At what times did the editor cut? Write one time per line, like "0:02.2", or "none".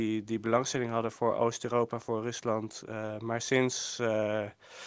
none